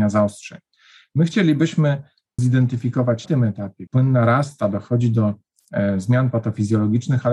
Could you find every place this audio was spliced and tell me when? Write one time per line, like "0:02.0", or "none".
0:02.4
0:03.3
0:03.9

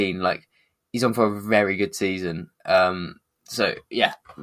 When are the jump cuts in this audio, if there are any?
none

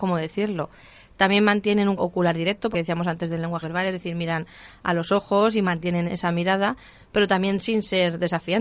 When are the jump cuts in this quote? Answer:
0:02.0
0:02.7
0:03.6
0:06.1

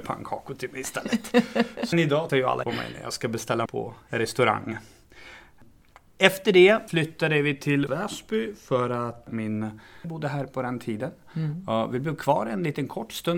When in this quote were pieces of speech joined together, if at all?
0:01.9
0:02.3
0:02.6
0:03.7
0:06.9
0:07.9
0:10.0

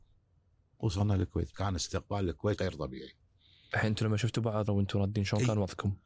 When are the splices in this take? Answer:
0:01.5
0:02.6
0:04.7

